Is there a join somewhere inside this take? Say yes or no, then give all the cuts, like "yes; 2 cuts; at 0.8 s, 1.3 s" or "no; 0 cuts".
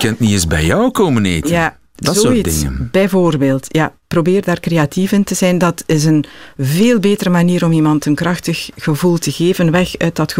no; 0 cuts